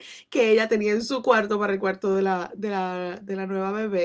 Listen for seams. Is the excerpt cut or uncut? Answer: uncut